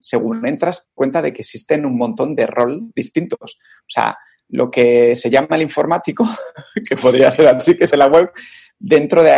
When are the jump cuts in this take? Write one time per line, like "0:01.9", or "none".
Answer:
0:01.0
0:02.9
0:07.9